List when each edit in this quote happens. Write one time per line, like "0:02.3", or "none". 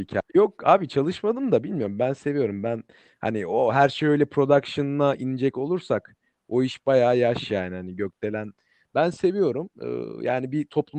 0:09.7